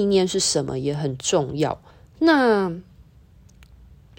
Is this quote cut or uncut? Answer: cut